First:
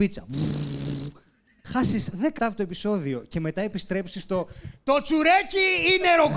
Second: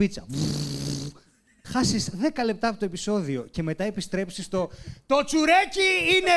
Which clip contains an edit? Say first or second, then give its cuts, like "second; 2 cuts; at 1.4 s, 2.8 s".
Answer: first; 1 cut; at 2.4 s